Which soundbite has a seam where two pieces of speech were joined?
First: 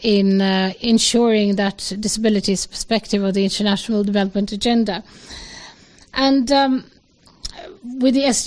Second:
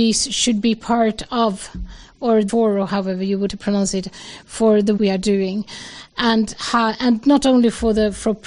second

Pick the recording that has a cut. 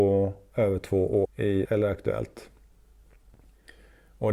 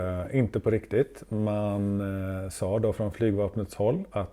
first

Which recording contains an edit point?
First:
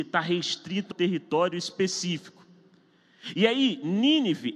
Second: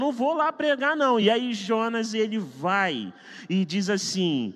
first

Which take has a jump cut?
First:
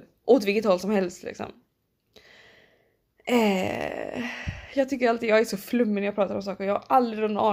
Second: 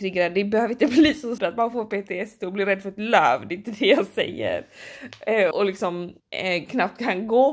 second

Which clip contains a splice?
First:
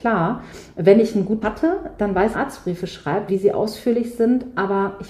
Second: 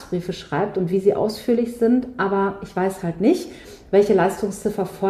first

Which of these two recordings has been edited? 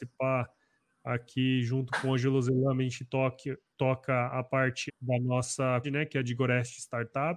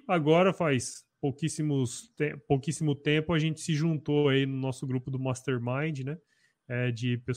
first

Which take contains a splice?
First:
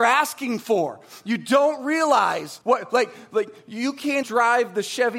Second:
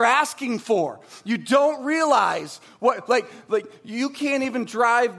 first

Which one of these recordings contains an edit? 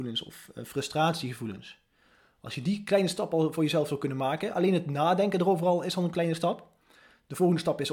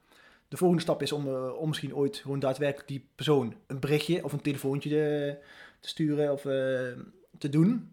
second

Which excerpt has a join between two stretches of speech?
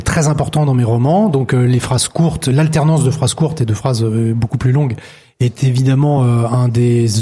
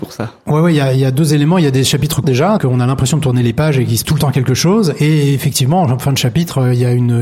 second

